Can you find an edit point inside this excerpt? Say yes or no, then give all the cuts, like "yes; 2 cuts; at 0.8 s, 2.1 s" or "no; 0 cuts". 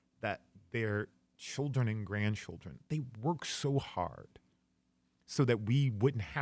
no; 0 cuts